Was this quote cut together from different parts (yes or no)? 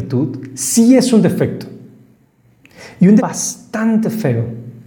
yes